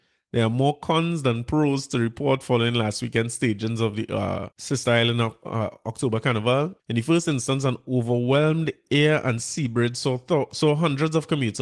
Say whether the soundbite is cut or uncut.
cut